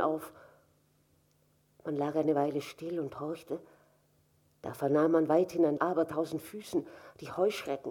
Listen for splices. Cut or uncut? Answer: cut